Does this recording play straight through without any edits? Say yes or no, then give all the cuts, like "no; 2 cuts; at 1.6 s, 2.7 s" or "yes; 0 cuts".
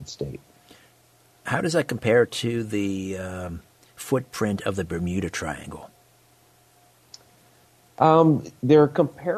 yes; 0 cuts